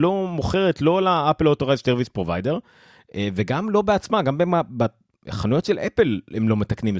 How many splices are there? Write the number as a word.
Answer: zero